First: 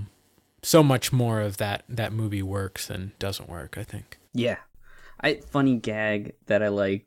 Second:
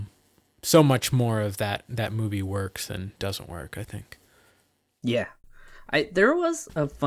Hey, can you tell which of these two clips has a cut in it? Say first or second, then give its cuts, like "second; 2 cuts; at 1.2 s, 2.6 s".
first; 2 cuts; at 4.3 s, 5.4 s